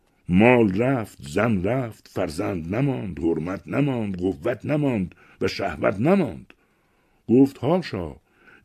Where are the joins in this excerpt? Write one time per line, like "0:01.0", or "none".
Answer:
none